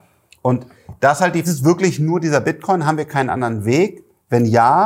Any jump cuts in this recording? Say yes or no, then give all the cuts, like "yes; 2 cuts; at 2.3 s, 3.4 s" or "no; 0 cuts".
yes; 1 cut; at 1.4 s